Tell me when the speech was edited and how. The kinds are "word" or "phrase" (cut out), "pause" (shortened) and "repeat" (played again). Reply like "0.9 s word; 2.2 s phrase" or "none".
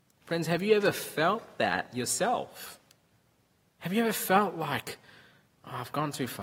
3.1 s pause